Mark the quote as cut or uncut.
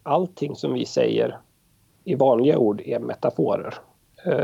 uncut